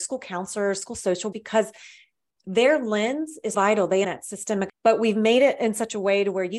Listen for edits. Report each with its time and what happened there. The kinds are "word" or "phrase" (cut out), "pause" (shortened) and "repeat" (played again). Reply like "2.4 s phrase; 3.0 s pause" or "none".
1.3 s word; 3.5 s word; 4.0 s word; 4.7 s word